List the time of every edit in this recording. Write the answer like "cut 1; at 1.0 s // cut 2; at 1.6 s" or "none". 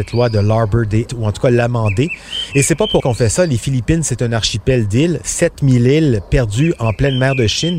cut 1; at 1.1 s // cut 2; at 3.0 s